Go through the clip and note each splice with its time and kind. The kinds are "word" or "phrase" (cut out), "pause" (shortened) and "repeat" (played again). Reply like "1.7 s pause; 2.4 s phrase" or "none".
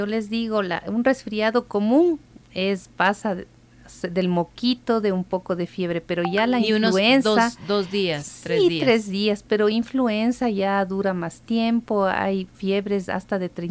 none

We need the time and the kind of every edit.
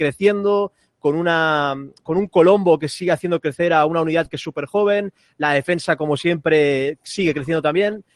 none

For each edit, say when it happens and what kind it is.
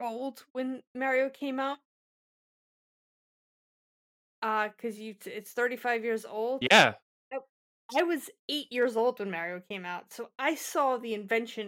none

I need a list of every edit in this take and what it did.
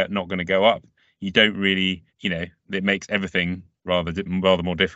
2.1 s pause

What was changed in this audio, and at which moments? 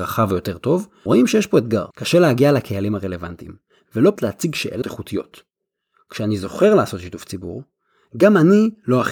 1.1 s word; 1.9 s pause; 4.2 s word; 4.8 s phrase

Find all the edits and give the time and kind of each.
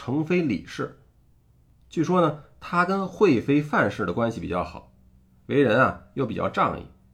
none

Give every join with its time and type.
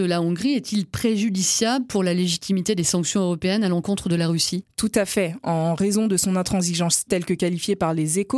7.1 s word

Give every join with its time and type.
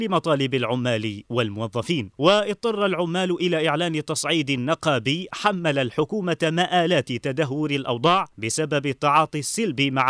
2.1 s pause; 8.3 s pause

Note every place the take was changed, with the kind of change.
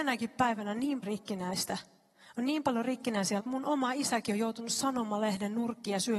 1.0 s word; 3.4 s word

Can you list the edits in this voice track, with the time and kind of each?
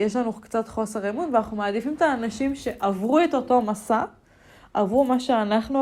none

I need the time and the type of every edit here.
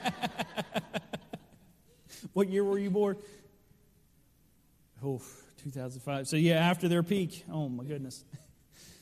none

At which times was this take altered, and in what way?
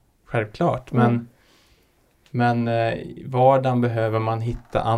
none

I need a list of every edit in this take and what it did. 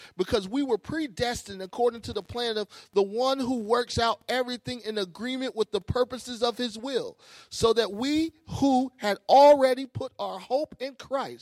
none

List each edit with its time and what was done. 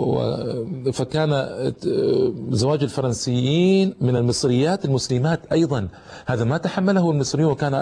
none

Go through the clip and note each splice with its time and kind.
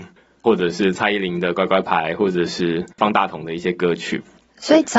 2.9 s pause

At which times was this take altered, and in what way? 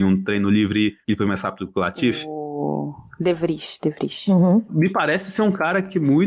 none

